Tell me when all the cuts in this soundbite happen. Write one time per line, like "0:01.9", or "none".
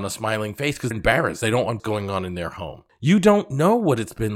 0:00.9
0:01.8